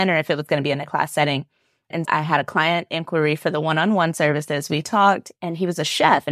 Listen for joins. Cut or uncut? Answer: cut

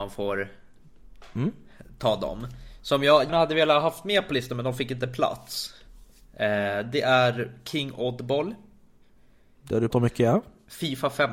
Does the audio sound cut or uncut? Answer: cut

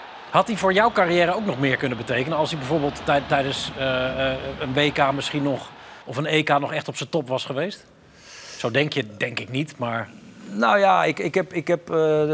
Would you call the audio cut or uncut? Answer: cut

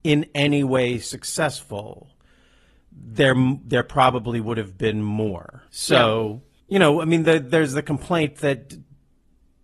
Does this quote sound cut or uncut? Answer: cut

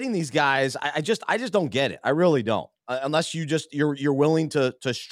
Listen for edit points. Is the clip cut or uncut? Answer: uncut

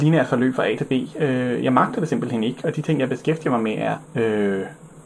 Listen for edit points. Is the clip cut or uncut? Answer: cut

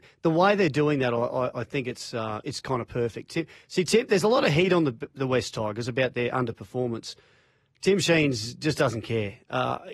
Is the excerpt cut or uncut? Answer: uncut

